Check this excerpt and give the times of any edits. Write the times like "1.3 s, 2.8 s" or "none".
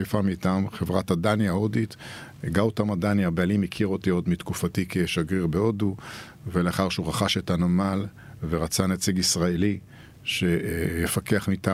none